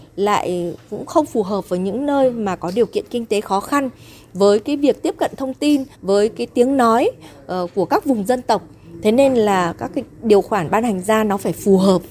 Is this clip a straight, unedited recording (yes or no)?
no